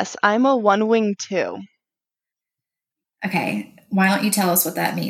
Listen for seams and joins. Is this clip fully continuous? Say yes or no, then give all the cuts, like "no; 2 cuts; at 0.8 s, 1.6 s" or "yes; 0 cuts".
yes; 0 cuts